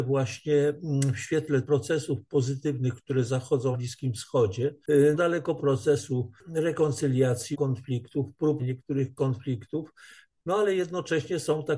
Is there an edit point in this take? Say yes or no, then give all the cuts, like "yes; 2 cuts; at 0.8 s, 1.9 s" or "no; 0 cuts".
yes; 6 cuts; at 1.6 s, 3.7 s, 5.1 s, 5.6 s, 7.5 s, 8.6 s